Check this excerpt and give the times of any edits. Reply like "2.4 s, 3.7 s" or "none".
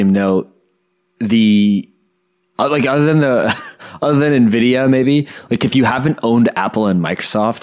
none